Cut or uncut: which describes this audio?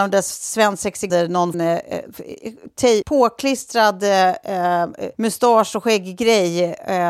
cut